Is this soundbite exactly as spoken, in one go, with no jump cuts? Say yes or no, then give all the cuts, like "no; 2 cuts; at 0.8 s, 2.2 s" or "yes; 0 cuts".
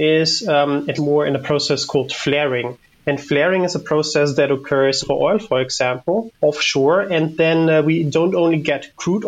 no; 3 cuts; at 1.0 s, 5.0 s, 6.3 s